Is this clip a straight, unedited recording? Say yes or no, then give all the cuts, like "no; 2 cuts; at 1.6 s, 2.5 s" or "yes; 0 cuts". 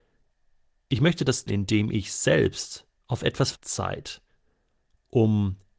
no; 3 cuts; at 1.5 s, 2.9 s, 3.5 s